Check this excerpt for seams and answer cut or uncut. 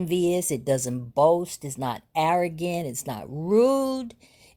uncut